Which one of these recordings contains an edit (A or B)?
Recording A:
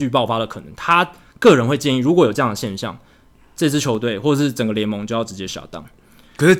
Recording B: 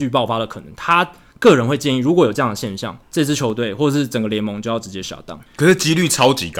B